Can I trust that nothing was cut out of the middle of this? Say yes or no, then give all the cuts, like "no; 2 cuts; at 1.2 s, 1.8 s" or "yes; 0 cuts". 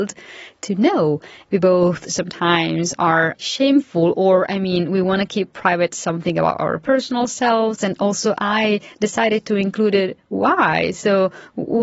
yes; 0 cuts